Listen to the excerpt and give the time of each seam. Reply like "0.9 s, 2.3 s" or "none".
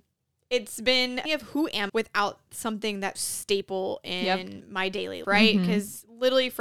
1.3 s, 1.9 s, 3.1 s, 5.2 s